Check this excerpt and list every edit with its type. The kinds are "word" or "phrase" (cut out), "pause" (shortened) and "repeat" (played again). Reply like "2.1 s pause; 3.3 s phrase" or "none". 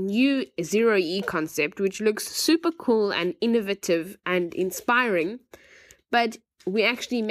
none